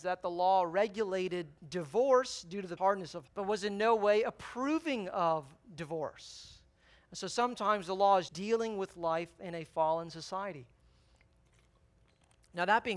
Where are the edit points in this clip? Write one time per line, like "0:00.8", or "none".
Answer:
0:02.8
0:03.3
0:08.3